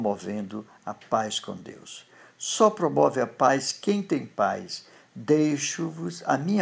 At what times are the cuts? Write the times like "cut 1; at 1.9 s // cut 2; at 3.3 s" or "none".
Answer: none

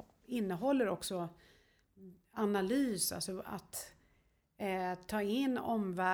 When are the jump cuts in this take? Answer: none

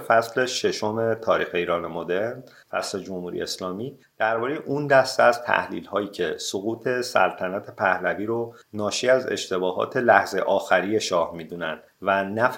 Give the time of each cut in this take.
none

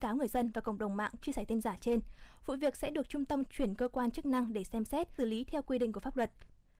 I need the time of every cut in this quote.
cut 1; at 1.2 s // cut 2; at 5.2 s

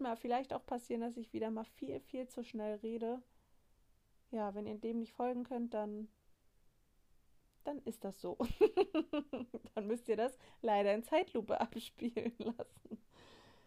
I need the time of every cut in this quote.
none

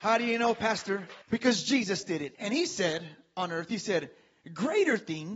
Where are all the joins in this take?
cut 1; at 1.2 s // cut 2; at 2.3 s

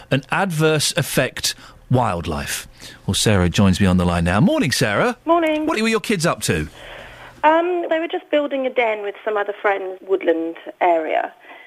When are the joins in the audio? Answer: cut 1; at 1.8 s // cut 2; at 5.2 s // cut 3; at 5.7 s // cut 4; at 7.9 s // cut 5; at 10.0 s

